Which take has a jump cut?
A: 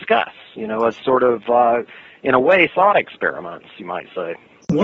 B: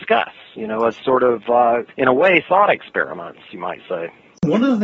B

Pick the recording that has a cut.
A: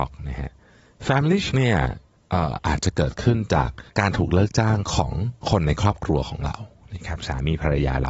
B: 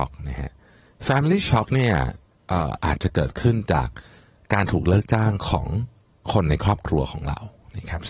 A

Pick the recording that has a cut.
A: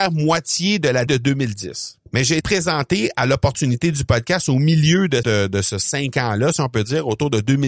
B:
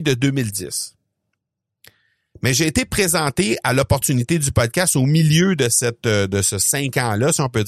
A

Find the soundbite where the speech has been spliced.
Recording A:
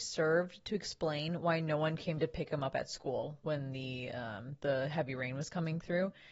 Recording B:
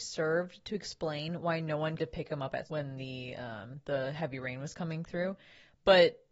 B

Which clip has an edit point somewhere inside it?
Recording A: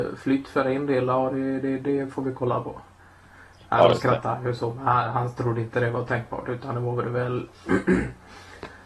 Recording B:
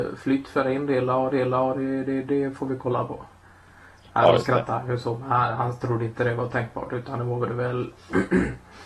B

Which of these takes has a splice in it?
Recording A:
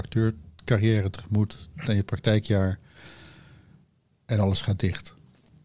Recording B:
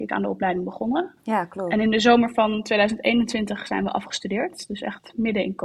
A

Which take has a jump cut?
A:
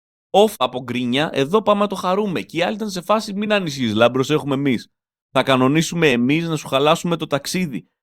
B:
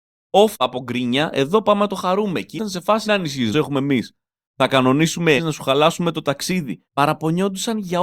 B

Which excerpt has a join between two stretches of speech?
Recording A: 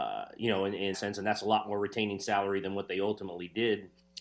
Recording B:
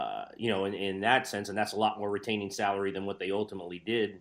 A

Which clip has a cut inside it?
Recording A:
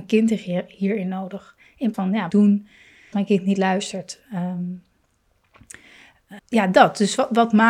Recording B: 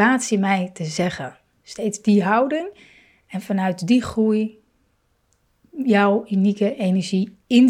A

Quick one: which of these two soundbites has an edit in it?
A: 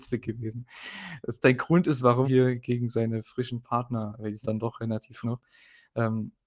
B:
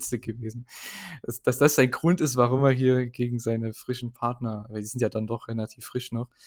A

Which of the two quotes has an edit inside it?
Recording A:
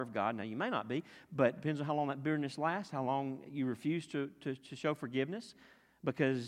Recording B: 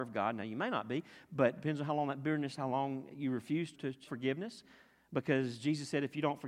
B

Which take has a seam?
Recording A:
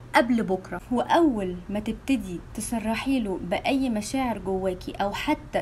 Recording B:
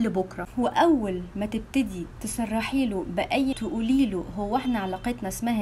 B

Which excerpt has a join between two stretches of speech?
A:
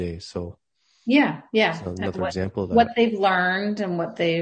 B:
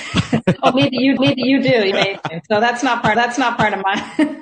B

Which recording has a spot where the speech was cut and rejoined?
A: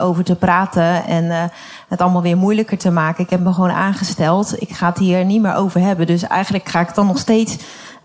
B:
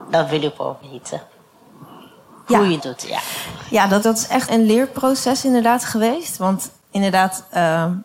B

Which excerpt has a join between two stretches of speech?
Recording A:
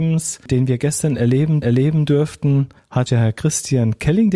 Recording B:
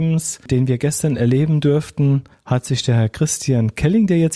A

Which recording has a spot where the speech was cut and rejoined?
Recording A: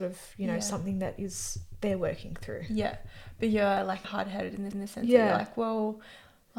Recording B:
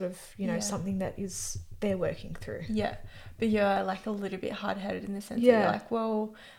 A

